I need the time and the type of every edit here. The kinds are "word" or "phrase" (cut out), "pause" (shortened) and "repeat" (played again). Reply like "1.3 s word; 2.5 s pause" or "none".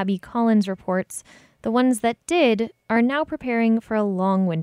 none